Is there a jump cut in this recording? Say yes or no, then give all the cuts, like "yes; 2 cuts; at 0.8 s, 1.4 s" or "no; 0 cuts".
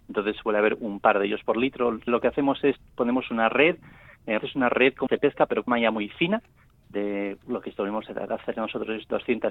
yes; 4 cuts; at 2.1 s, 4.4 s, 5.1 s, 5.7 s